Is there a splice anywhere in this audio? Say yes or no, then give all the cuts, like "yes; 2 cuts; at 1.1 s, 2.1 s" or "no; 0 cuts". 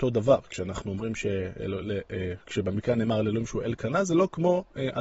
no; 0 cuts